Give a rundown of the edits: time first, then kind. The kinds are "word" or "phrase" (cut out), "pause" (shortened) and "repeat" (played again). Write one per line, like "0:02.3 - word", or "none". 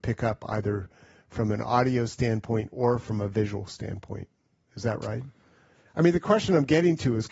none